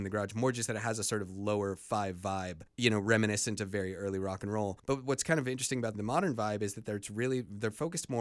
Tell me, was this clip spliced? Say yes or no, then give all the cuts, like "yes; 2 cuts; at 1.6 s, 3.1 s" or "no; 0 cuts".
yes; 1 cut; at 5.9 s